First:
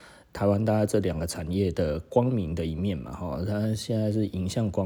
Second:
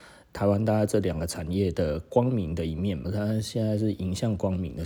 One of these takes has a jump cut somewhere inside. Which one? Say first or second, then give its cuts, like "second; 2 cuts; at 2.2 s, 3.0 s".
second; 1 cut; at 3.0 s